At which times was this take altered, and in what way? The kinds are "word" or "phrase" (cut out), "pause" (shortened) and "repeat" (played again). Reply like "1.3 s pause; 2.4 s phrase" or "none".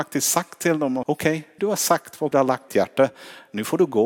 1.0 s word; 1.6 s word; 2.3 s word; 2.7 s word